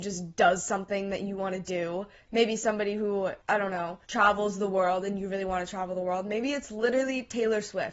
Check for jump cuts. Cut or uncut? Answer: cut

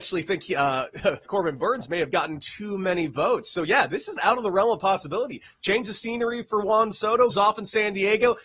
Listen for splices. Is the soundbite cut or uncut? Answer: cut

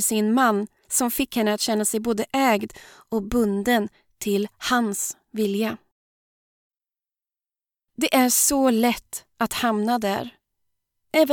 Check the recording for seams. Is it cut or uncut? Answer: uncut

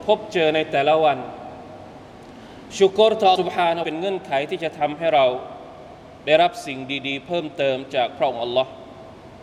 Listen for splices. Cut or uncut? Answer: cut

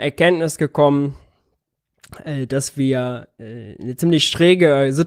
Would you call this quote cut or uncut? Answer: uncut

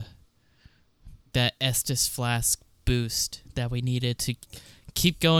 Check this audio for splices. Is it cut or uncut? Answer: cut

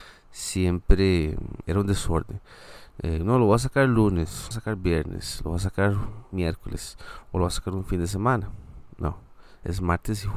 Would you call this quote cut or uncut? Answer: cut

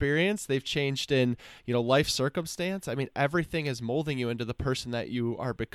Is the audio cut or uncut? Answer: uncut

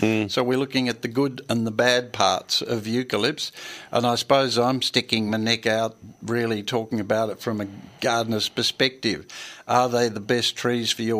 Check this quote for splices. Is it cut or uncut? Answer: uncut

